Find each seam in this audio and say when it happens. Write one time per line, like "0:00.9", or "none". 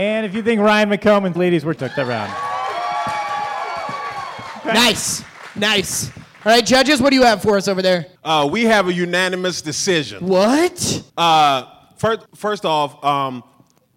0:01.4
0:01.8
0:08.2
0:11.1
0:12.3